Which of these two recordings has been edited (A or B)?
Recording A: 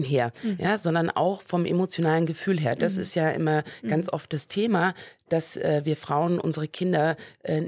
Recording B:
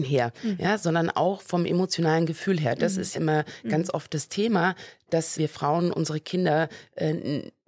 B